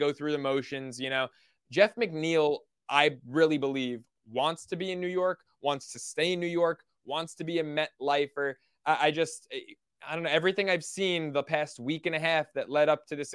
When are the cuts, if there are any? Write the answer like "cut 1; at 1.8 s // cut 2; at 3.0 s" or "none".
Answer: none